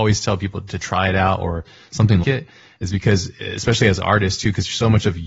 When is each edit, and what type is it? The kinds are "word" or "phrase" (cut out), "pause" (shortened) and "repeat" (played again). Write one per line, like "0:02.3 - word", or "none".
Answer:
0:02.2 - word

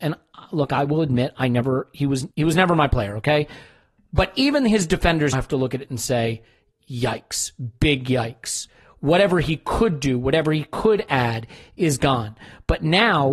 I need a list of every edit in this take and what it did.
0:02.3 - pause
0:05.3 - word

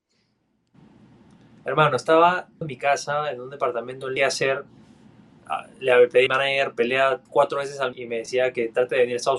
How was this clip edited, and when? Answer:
0:02.6 - word
0:04.2 - phrase
0:06.3 - phrase
0:07.3 - pause
0:07.9 - word

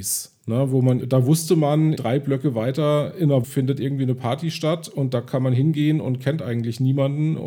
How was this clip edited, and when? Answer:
0:01.0 - word
0:02.0 - word
0:03.4 - word

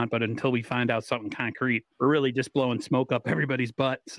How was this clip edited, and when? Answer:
0:01.9 - pause

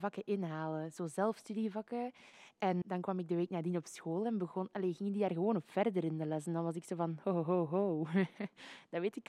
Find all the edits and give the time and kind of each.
0:02.8 - word

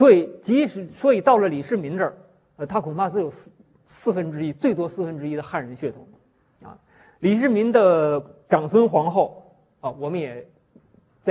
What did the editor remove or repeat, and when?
none

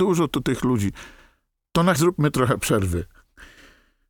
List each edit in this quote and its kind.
0:02.0 - word

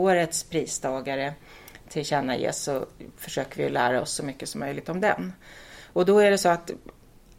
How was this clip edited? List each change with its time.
0:03.2 - pause

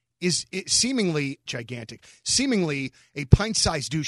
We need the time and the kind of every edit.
0:01.5 - phrase

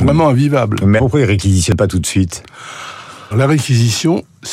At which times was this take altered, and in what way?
0:01.0 - word
0:03.3 - word

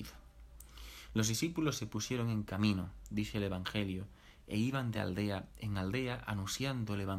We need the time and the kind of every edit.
none

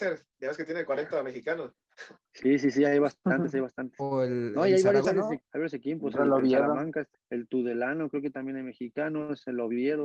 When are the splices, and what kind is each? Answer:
0:05.0 - word
0:05.4 - word
0:07.1 - word

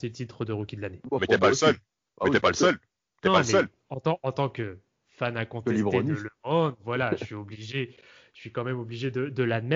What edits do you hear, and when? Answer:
none

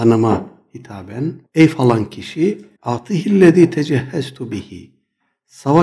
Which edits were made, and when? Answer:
0:01.5 - pause
0:02.8 - pause

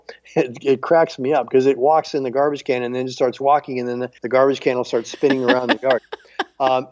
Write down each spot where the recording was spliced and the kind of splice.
0:04.2 - pause

